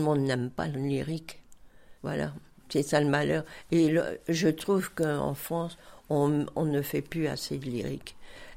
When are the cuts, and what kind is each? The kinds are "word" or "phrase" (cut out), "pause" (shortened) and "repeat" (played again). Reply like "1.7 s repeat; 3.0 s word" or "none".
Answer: 2.0 s pause